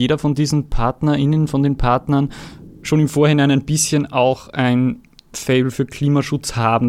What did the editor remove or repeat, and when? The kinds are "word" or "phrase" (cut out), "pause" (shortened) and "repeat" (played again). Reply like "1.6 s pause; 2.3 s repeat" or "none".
none